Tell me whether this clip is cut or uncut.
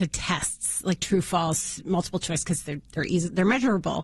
cut